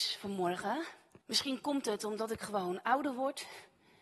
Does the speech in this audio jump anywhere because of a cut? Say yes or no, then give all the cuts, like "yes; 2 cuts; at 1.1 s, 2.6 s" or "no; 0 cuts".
yes; 1 cut; at 1.2 s